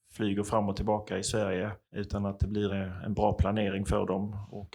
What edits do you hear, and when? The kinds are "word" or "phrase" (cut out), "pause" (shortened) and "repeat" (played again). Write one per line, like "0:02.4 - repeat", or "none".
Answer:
0:01.8 - pause
0:02.7 - word